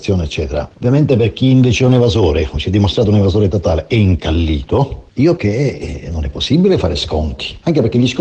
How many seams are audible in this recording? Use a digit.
1